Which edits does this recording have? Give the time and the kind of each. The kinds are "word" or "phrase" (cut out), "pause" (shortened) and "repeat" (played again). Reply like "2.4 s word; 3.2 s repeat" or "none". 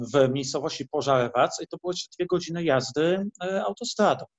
none